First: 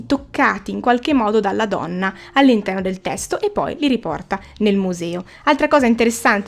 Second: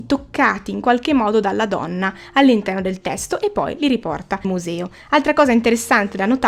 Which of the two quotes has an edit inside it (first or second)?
second